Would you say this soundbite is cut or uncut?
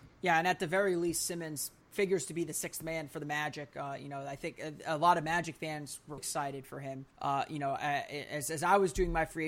cut